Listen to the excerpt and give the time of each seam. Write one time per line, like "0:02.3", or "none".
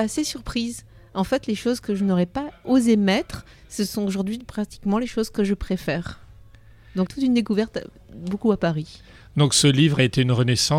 0:07.1